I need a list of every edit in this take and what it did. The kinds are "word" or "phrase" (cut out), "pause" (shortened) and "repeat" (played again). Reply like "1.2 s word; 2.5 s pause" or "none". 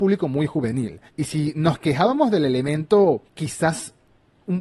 1.1 s pause; 3.3 s pause